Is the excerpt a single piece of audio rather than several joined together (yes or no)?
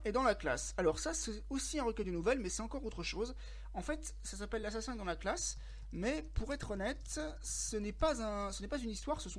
yes